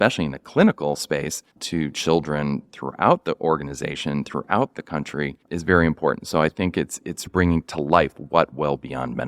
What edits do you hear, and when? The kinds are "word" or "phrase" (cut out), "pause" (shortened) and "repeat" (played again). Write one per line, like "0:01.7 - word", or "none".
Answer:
0:01.5 - pause
0:05.4 - pause
0:07.3 - word